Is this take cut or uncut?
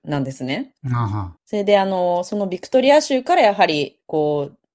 cut